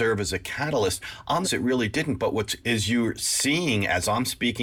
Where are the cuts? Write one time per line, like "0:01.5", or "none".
0:01.4
0:02.6